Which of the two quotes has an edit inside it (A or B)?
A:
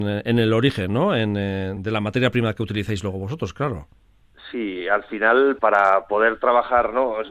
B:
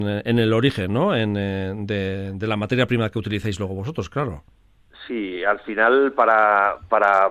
A